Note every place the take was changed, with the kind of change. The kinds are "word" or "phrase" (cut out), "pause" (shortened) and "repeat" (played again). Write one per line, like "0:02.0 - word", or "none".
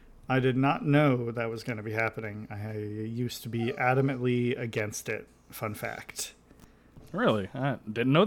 none